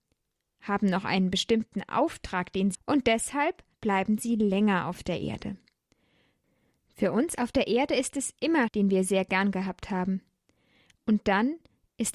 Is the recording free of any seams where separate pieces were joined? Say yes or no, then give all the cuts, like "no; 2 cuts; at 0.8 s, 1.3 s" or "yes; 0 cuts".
no; 3 cuts; at 2.7 s, 3.7 s, 8.7 s